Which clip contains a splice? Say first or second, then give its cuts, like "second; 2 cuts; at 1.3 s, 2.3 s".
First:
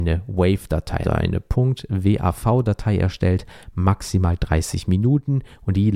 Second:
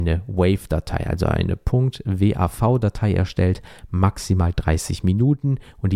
first; 1 cut; at 1.0 s